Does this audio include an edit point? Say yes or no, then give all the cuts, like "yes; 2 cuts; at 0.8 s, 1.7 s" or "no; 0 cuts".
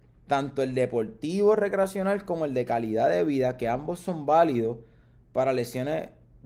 no; 0 cuts